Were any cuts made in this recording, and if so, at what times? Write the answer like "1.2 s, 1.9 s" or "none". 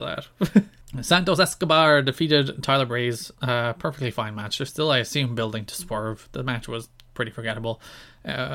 3.3 s